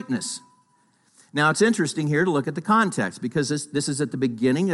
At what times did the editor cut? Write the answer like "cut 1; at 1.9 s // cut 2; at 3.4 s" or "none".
none

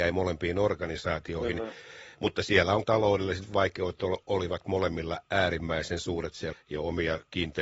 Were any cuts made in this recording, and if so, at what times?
cut 1; at 2.8 s // cut 2; at 6.5 s

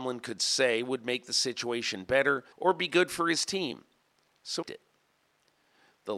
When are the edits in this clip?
cut 1; at 2.5 s // cut 2; at 4.6 s

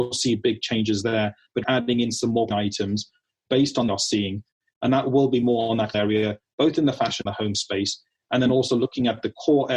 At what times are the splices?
cut 1; at 1.6 s // cut 2; at 2.5 s // cut 3; at 3.9 s // cut 4; at 5.9 s // cut 5; at 7.3 s

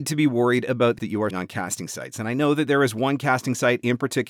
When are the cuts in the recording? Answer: cut 1; at 1.0 s // cut 2; at 1.3 s

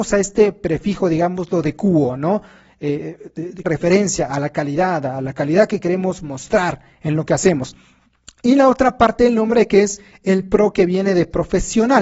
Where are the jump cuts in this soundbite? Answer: cut 1; at 3.6 s

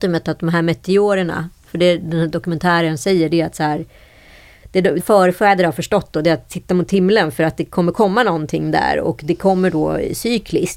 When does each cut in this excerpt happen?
cut 1; at 5.0 s

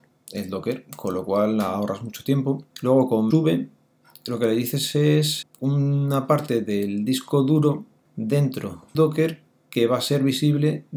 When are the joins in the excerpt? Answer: cut 1; at 2.7 s // cut 2; at 3.3 s // cut 3; at 5.4 s // cut 4; at 8.9 s

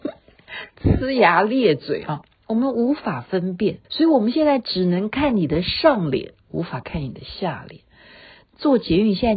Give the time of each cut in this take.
cut 1; at 3.8 s

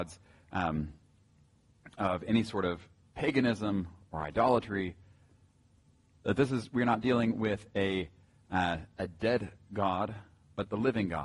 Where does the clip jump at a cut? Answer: none

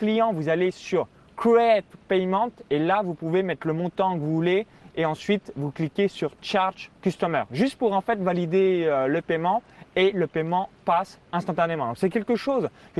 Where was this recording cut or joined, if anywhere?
none

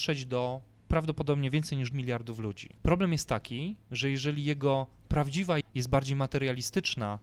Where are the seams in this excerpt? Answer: cut 1; at 1.9 s // cut 2; at 2.8 s // cut 3; at 5.6 s

